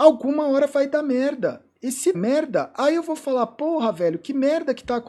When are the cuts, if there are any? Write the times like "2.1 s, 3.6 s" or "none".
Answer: 2.1 s